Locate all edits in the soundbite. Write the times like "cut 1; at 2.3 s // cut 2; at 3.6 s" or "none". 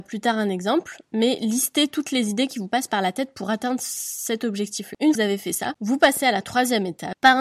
cut 1; at 5.1 s